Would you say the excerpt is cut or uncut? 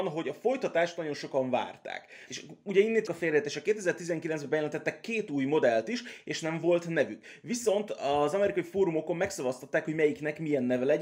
cut